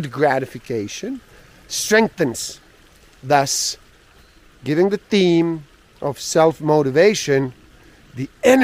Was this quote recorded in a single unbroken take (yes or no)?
yes